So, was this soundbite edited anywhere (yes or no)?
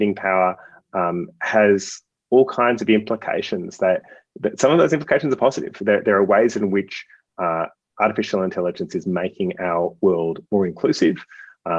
no